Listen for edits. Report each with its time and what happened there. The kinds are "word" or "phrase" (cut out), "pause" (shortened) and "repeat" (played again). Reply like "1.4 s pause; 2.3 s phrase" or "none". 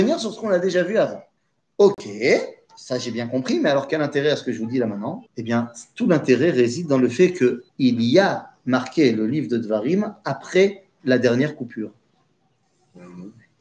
1.4 s pause; 5.3 s pause; 7.7 s pause